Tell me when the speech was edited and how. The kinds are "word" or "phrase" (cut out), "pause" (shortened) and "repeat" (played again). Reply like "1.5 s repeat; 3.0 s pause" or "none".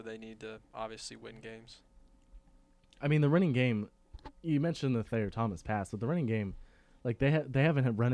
none